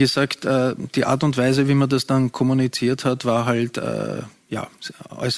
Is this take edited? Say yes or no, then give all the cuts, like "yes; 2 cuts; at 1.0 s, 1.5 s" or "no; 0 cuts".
no; 0 cuts